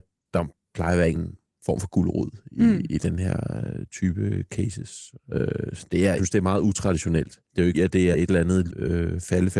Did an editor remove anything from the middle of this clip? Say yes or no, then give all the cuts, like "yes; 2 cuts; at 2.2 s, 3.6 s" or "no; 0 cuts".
yes; 6 cuts; at 1.1 s, 6.2 s, 7.4 s, 7.7 s, 8.1 s, 8.7 s